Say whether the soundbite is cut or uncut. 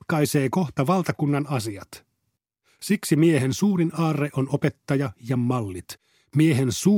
uncut